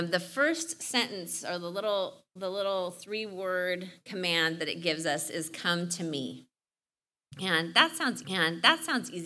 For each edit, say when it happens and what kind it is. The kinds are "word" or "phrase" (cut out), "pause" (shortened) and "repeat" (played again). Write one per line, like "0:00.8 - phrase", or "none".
0:08.2 - repeat

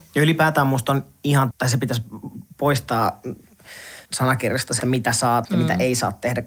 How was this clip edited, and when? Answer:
0:01.5 - word
0:04.0 - pause
0:04.8 - word
0:05.4 - word

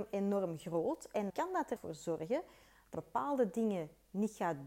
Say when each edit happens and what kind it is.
0:01.3 - word
0:01.8 - word
0:02.9 - word

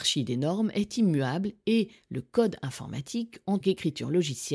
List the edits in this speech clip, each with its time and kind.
0:03.6 - word

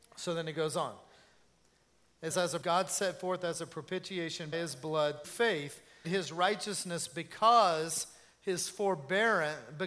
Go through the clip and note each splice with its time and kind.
0:02.3 - word
0:02.6 - phrase
0:04.5 - word
0:05.2 - word
0:06.0 - phrase

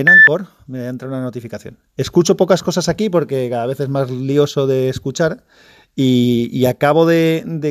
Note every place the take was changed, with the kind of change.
none

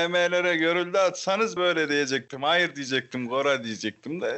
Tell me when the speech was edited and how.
0:01.6 - word

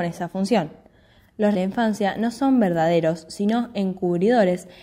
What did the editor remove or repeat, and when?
0:01.5 - phrase

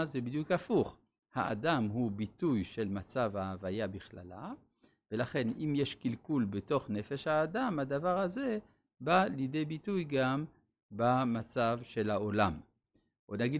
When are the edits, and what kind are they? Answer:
none

